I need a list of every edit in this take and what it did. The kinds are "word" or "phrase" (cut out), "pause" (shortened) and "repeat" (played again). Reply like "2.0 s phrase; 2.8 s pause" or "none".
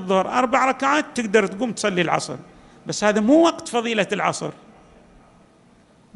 none